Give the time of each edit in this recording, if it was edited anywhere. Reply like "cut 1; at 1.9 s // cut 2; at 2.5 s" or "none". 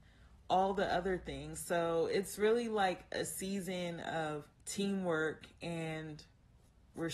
cut 1; at 4.5 s